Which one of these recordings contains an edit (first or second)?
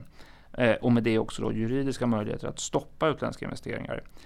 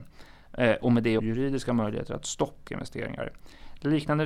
second